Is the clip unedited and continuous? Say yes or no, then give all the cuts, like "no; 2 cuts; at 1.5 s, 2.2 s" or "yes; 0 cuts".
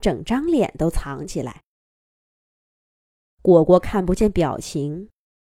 yes; 0 cuts